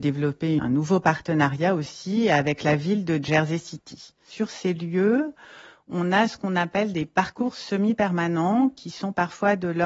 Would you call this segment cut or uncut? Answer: uncut